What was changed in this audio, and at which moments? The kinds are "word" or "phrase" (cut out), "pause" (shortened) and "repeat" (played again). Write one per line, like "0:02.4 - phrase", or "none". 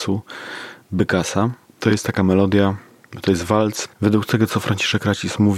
0:03.9 - pause